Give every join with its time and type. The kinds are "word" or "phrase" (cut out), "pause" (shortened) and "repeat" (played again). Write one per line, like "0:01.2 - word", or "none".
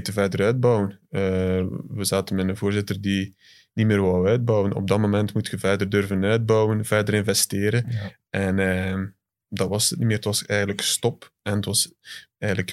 none